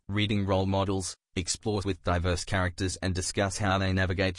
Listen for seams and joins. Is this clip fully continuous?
no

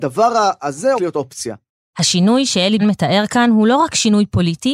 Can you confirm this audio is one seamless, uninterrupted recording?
no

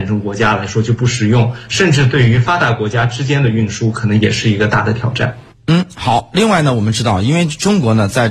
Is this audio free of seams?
yes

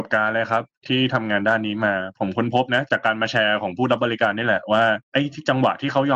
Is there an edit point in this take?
yes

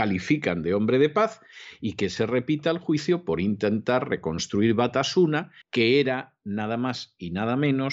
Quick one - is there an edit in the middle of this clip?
yes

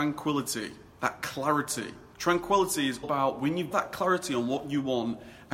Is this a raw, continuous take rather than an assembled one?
no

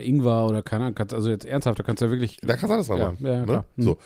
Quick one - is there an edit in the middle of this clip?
no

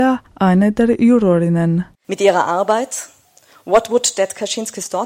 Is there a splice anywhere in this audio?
yes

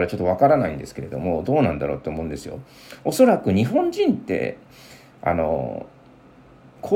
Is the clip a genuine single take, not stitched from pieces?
yes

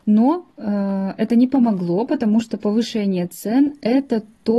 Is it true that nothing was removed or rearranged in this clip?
yes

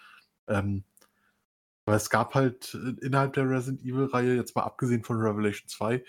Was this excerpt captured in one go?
yes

